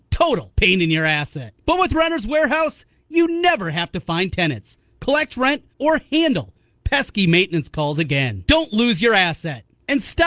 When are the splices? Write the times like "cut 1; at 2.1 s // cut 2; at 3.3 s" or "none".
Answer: cut 1; at 5.7 s